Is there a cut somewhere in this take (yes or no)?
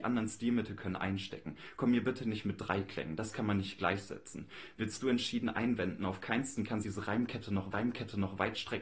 yes